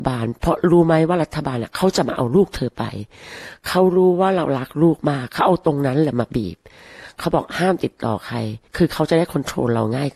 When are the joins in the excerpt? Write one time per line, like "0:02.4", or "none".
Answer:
0:08.7